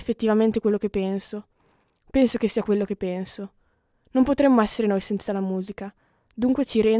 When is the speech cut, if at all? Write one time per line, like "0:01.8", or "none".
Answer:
none